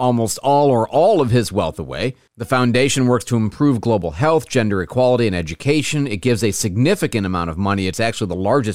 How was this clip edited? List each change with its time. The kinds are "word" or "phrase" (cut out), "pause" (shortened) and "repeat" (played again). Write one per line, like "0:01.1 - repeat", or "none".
none